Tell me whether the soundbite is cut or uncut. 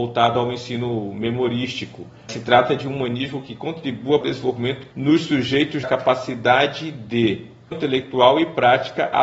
cut